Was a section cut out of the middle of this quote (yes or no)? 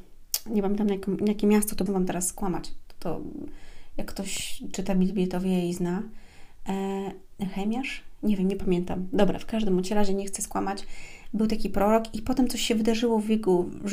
yes